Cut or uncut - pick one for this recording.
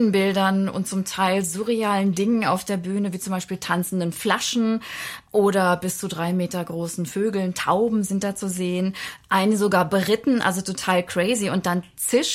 uncut